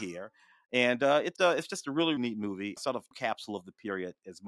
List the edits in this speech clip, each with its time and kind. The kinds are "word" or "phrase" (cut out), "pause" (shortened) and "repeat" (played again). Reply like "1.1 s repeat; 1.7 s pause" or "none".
1.4 s word; 2.2 s word; 2.8 s word; 3.1 s word

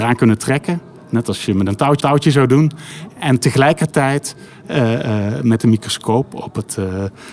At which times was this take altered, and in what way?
2.0 s repeat

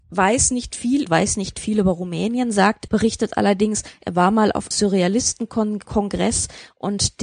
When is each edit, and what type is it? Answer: 1.1 s phrase; 2.9 s word; 4.7 s word

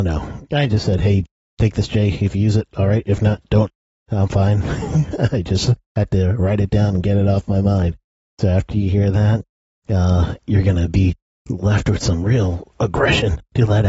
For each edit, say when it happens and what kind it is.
none

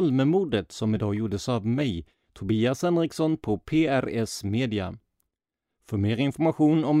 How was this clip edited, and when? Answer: none

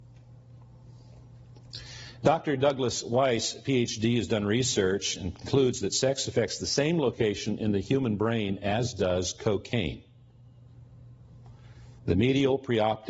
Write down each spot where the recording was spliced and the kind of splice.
12.0 s pause

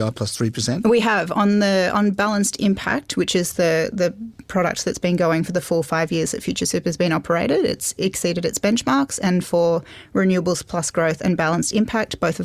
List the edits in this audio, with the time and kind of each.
none

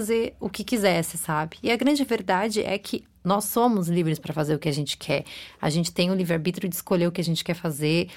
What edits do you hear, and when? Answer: none

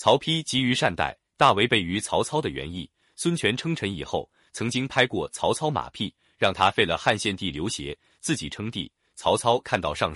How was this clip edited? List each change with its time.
none

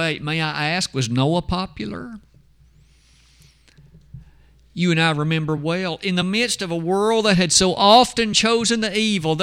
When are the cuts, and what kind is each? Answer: none

